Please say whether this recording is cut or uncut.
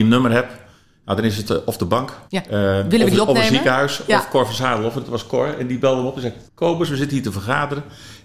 cut